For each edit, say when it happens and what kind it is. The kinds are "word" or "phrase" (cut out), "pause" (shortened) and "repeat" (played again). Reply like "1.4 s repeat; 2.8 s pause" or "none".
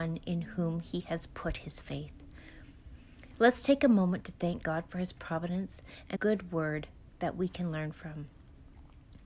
6.2 s word